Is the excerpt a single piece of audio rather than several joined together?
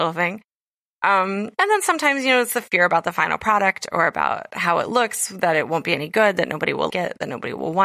no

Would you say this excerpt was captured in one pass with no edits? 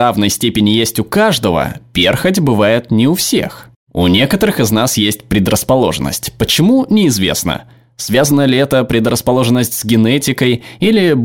yes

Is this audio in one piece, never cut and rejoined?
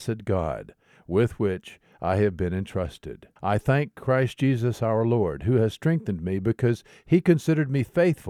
no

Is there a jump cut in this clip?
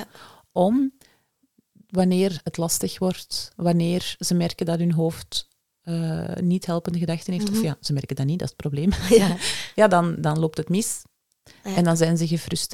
no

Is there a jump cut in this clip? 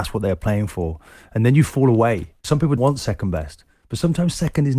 yes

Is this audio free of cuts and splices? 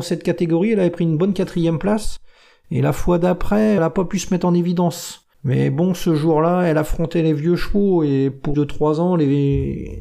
no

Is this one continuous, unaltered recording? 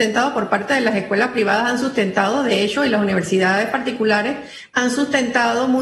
yes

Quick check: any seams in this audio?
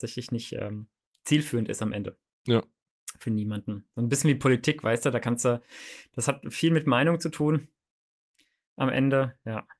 no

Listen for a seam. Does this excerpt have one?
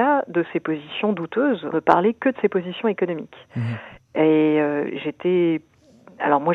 yes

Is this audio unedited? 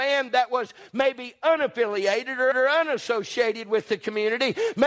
no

